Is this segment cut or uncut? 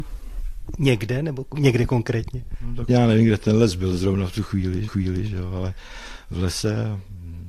cut